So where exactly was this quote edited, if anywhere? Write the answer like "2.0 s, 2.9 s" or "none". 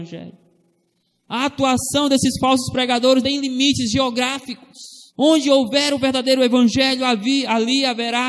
3.2 s, 5.1 s